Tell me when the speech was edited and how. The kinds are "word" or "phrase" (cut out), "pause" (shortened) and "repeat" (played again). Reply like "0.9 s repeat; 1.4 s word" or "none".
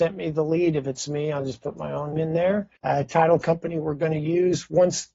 2.1 s word; 2.8 s pause